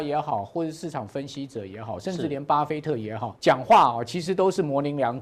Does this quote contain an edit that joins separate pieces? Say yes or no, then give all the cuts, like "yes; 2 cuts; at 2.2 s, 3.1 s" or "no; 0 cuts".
yes; 1 cut; at 3.4 s